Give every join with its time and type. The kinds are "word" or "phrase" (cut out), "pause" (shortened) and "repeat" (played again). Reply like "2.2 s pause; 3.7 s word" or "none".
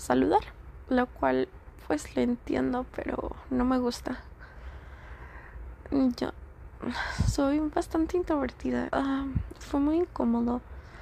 8.9 s word